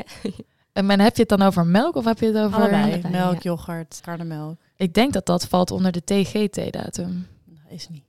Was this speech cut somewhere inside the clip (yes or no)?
yes